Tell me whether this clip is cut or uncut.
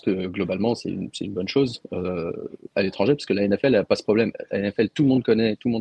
uncut